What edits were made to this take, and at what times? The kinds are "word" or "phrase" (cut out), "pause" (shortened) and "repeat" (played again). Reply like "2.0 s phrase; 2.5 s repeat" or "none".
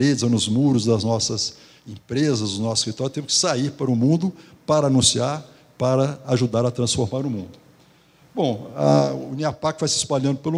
none